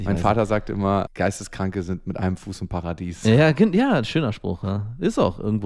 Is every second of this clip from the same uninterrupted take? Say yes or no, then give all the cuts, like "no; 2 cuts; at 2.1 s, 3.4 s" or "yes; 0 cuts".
yes; 0 cuts